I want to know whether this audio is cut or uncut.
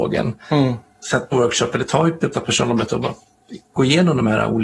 cut